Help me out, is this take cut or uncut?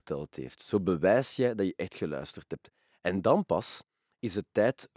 uncut